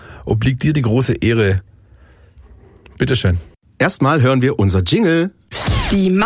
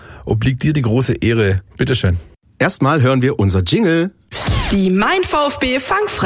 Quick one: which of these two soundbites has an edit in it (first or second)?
second